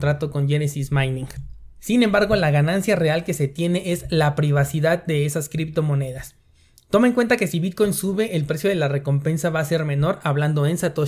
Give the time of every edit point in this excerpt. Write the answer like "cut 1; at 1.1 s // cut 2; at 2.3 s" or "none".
none